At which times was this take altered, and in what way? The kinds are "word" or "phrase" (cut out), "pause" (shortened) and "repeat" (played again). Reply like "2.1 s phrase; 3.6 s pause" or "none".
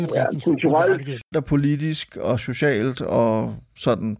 1.3 s word